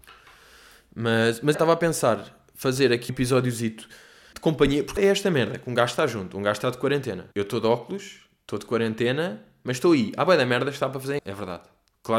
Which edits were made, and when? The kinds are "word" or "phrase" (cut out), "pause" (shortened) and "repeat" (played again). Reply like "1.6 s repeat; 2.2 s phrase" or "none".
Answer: 1.5 s word; 3.1 s word; 4.3 s word; 5.0 s word; 7.3 s pause; 11.2 s phrase